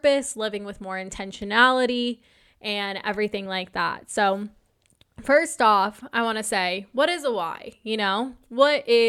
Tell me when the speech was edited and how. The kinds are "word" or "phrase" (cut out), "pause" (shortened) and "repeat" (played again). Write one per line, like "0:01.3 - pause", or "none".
none